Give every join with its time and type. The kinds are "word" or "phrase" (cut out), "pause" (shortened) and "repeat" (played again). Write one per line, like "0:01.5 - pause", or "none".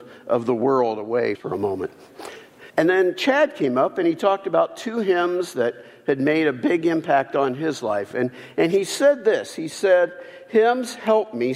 0:01.4 - phrase
0:02.7 - pause